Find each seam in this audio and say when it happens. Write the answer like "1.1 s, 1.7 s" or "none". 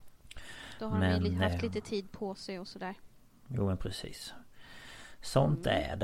3.2 s